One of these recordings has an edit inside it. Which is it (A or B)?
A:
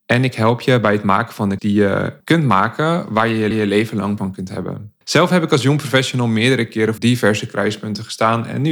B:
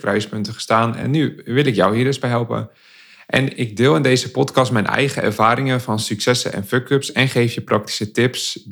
A